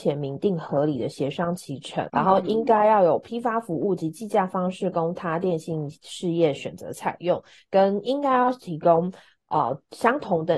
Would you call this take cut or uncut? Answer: cut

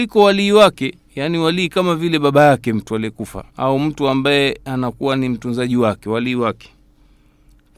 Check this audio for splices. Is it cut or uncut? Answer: cut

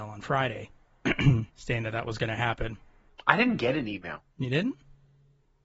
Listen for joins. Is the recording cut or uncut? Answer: cut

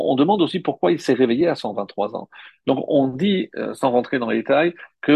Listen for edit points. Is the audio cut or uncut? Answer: uncut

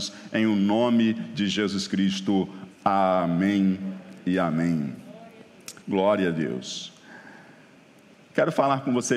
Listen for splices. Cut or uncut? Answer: cut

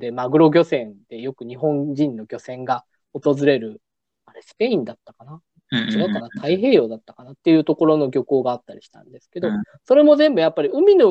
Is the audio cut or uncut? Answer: uncut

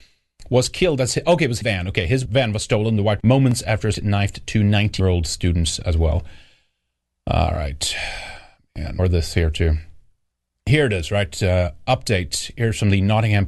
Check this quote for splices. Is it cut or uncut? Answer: cut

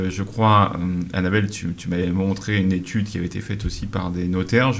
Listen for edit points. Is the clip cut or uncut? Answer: uncut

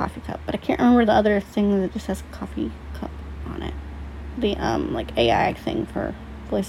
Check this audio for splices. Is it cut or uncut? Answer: uncut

